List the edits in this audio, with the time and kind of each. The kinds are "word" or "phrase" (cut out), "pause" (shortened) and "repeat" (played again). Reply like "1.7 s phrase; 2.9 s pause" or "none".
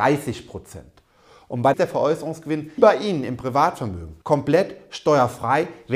1.7 s phrase; 2.8 s word; 4.2 s pause